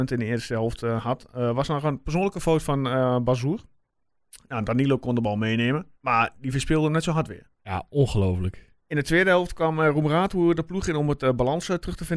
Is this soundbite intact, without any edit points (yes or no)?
no